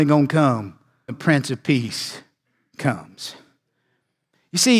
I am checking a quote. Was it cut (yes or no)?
yes